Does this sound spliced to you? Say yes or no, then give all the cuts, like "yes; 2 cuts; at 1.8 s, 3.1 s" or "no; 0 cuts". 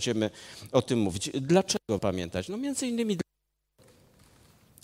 yes; 1 cut; at 2.0 s